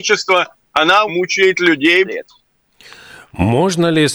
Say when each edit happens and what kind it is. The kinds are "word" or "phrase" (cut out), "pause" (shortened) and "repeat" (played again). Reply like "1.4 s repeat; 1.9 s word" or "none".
1.1 s word; 2.0 s phrase